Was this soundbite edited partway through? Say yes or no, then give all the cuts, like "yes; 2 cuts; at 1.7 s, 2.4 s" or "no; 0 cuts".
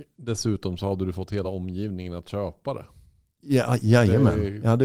no; 0 cuts